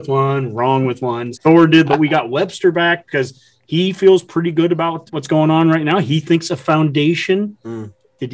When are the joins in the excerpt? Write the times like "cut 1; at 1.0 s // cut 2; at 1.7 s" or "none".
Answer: cut 1; at 1.3 s // cut 2; at 1.9 s // cut 3; at 5.1 s

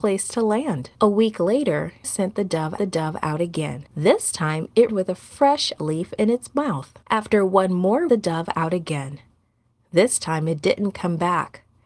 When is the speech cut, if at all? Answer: cut 1; at 0.9 s // cut 2; at 2.0 s // cut 3; at 2.8 s // cut 4; at 3.9 s // cut 5; at 4.9 s // cut 6; at 5.8 s // cut 7; at 7.0 s // cut 8; at 8.1 s

